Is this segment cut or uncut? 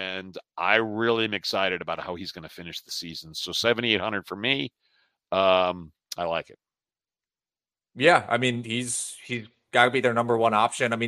uncut